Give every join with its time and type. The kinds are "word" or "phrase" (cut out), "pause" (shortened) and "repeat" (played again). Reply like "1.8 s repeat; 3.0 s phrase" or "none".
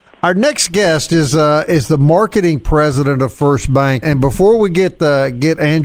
4.0 s word